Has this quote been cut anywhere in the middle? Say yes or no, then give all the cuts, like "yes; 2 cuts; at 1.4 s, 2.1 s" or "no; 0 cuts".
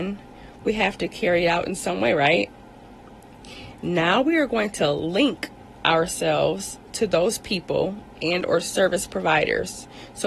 no; 0 cuts